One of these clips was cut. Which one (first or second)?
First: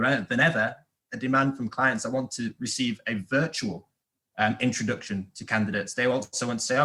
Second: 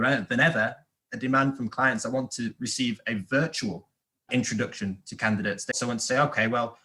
second